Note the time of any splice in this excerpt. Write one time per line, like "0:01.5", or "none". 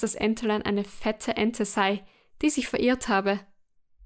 none